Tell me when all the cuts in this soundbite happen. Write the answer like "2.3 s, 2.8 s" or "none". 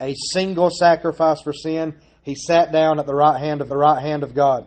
3.7 s